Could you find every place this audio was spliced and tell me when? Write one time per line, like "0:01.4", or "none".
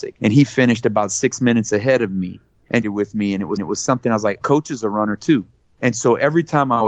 0:02.8
0:03.6
0:04.4